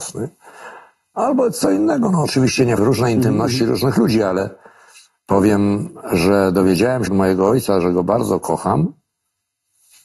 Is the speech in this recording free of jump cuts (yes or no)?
no